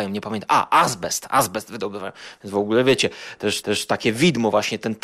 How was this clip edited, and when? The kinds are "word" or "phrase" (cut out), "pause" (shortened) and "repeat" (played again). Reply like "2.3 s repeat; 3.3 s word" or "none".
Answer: 3.6 s repeat